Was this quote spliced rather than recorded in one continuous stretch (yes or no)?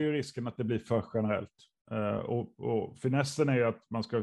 no